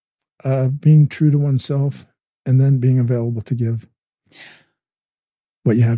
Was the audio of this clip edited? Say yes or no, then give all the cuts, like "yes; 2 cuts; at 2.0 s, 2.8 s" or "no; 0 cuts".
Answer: yes; 1 cut; at 2.2 s